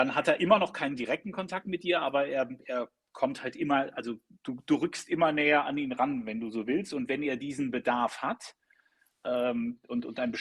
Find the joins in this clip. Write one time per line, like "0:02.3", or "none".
none